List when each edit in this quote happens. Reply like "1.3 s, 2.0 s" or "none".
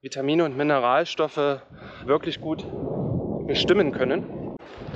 2.1 s

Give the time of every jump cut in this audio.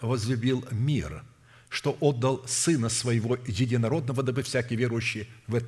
none

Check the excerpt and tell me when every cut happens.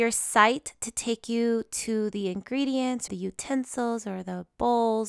3.1 s

